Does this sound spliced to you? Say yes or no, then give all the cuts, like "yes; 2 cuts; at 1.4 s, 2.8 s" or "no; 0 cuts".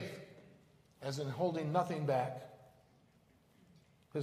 no; 0 cuts